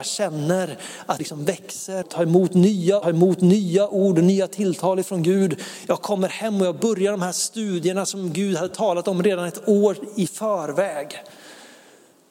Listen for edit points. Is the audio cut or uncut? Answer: cut